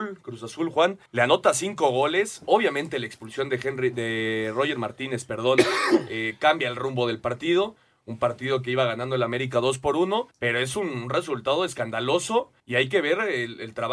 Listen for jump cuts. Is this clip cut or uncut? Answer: cut